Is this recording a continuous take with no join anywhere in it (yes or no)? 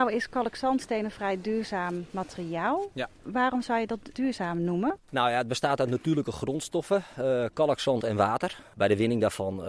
no